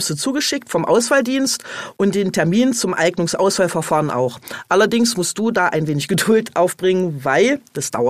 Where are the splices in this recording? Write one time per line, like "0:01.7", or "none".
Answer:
none